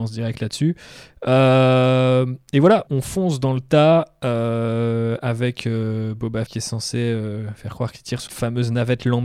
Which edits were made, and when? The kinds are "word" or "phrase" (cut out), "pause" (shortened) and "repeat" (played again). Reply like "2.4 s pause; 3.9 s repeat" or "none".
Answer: 2.9 s word; 6.5 s word; 8.3 s word

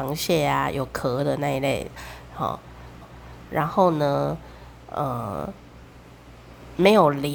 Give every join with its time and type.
3.0 s repeat

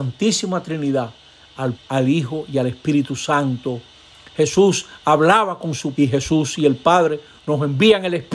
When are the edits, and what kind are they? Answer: 1.7 s word; 5.9 s word

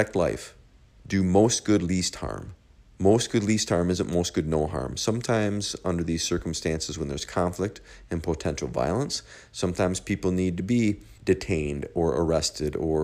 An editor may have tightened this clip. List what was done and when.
2.7 s pause; 11.2 s pause

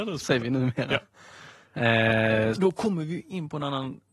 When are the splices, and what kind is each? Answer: 2.6 s word

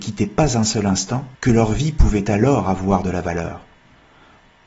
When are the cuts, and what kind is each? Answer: 1.3 s pause

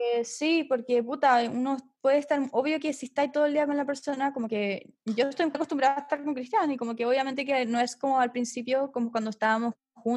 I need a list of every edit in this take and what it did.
5.5 s word

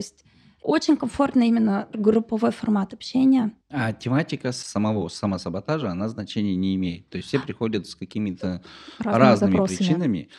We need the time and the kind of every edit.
3.6 s pause

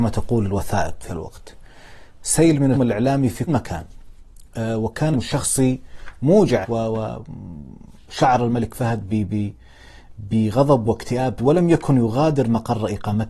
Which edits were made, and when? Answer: 1.1 s word; 2.7 s word; 3.5 s word; 5.1 s word; 6.6 s word; 11.4 s word

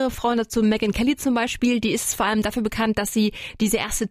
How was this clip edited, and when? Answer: none

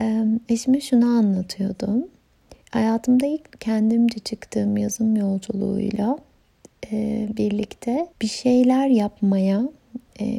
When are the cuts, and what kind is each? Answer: 2.6 s pause; 3.5 s phrase; 8.1 s pause

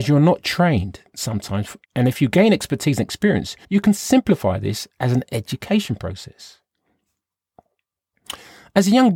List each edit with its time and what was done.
1.8 s pause; 3.6 s pause

